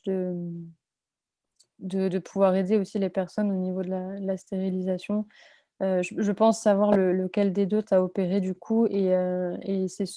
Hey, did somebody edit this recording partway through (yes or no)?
no